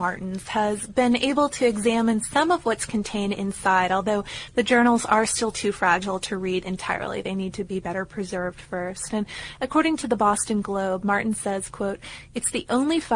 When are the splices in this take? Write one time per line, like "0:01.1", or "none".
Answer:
none